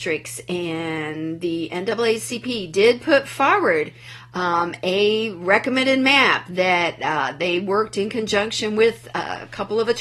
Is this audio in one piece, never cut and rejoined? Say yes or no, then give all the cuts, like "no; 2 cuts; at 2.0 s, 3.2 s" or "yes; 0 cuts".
yes; 0 cuts